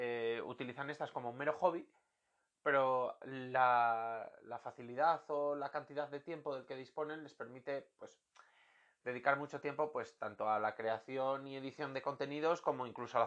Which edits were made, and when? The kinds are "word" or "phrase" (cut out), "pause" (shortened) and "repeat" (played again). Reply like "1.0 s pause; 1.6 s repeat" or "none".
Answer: none